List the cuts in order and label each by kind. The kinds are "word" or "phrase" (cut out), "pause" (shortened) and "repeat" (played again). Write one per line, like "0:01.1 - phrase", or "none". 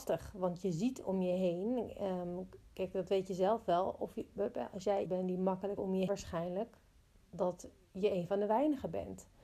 0:02.7 - pause
0:05.1 - word
0:05.8 - phrase
0:06.1 - word